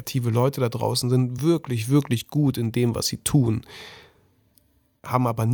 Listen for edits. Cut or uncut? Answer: uncut